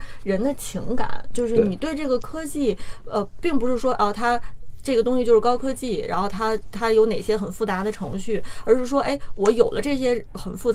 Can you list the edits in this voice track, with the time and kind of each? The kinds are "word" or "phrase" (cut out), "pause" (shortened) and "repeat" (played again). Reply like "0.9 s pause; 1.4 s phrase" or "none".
none